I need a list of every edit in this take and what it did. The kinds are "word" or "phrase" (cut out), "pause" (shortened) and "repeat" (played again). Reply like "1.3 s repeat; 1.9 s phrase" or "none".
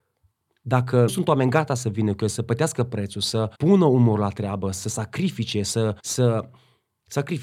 1.1 s word; 3.5 s pause; 6.0 s pause